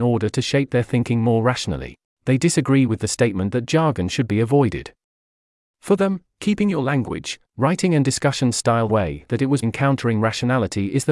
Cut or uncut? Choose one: cut